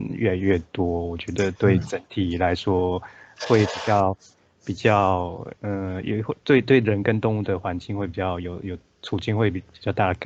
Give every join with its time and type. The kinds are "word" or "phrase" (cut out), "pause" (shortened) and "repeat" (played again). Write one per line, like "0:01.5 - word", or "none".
none